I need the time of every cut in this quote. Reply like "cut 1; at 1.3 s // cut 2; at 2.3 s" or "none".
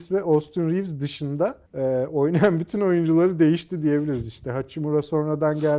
cut 1; at 1.7 s